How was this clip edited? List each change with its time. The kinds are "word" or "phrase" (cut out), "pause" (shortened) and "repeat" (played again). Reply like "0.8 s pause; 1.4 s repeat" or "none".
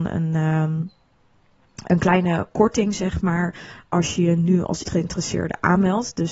4.8 s word